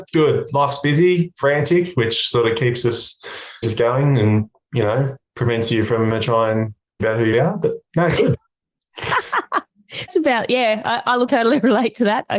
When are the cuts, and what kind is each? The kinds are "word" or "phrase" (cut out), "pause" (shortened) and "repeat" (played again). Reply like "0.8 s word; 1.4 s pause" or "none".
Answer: 3.6 s word; 6.1 s word; 7.0 s word; 7.3 s word; 10.1 s word; 11.3 s word